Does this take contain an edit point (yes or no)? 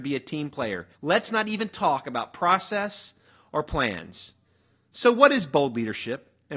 yes